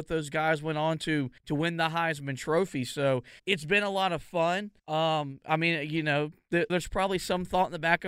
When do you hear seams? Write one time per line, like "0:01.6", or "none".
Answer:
0:01.4
0:03.4
0:04.8
0:06.7